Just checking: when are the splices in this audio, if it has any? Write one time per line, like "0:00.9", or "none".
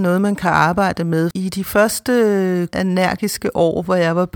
0:01.3
0:02.7